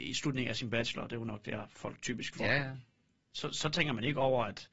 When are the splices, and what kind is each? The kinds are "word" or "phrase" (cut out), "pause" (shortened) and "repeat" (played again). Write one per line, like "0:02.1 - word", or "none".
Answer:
none